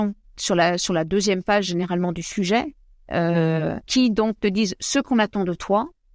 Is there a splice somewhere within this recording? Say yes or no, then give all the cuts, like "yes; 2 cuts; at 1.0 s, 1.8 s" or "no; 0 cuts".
yes; 1 cut; at 3.8 s